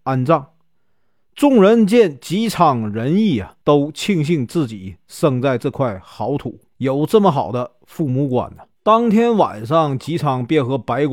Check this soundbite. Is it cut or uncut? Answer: cut